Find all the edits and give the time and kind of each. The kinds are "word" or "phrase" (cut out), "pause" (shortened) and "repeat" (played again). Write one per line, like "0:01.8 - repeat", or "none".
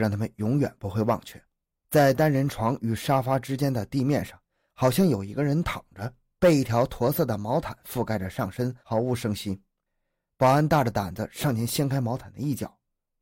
none